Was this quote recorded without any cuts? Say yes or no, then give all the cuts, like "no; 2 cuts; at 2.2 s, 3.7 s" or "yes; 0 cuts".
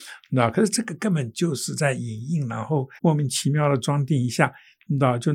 no; 1 cut; at 3.0 s